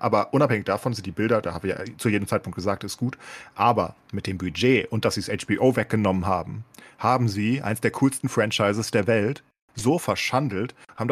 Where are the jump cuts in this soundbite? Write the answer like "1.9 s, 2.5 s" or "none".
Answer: none